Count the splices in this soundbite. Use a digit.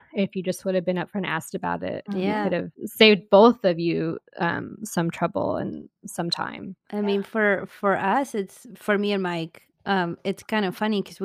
1